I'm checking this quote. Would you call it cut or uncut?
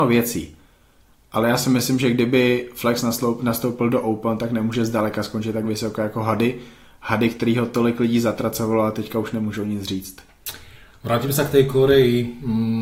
uncut